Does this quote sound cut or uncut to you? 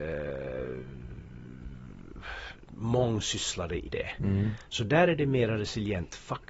cut